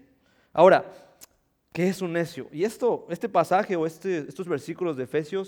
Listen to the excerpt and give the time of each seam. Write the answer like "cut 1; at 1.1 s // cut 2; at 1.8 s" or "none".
none